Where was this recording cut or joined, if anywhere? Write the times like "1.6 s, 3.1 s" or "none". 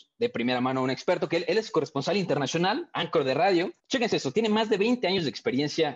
3.8 s